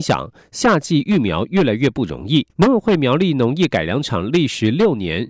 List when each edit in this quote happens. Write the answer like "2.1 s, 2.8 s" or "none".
2.5 s

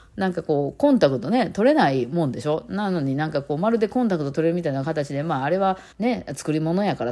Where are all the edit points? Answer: 5.9 s

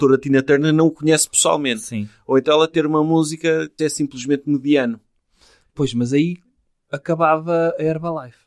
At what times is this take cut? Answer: 3.8 s

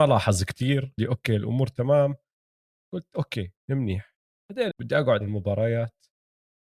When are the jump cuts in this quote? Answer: 1.0 s, 4.7 s, 5.2 s

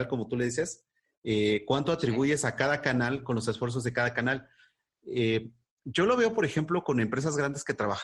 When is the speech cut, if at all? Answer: none

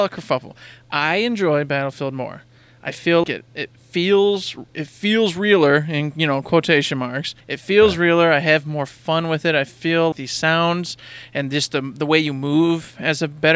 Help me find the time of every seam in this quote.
3.2 s, 4.7 s, 7.4 s, 10.1 s

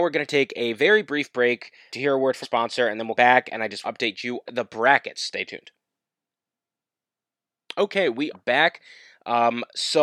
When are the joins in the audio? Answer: 1.9 s, 2.4 s, 3.2 s, 3.8 s, 4.5 s, 8.3 s

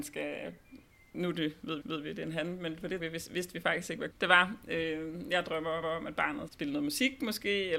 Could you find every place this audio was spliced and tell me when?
1.8 s, 3.0 s, 4.1 s, 5.8 s, 6.5 s

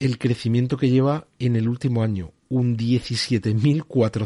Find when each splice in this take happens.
none

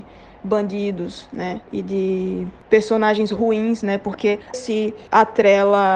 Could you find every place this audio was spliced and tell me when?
1.6 s, 4.5 s

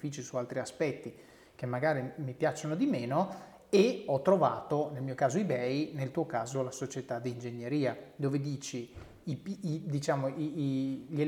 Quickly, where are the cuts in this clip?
none

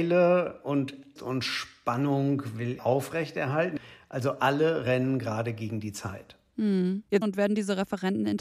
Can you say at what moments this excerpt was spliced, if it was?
1.2 s, 2.8 s, 7.2 s

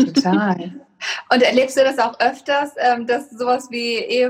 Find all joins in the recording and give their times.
none

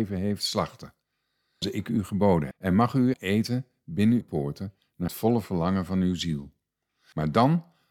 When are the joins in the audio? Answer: 1.6 s, 2.5 s, 3.1 s, 4.2 s, 5.1 s

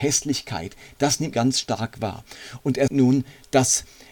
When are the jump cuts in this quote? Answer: 1.3 s, 2.9 s

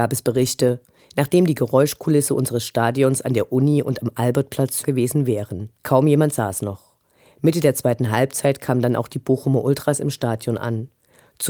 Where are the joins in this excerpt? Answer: 4.8 s, 5.8 s

